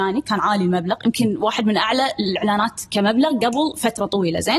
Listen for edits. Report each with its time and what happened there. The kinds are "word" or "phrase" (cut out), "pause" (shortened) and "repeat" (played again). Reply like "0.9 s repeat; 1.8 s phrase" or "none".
none